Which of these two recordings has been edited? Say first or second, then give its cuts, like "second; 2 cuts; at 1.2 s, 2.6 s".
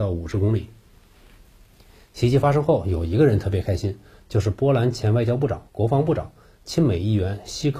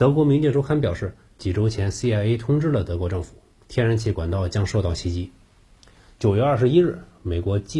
first; 1 cut; at 5.7 s